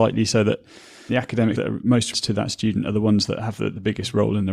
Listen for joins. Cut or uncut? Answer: cut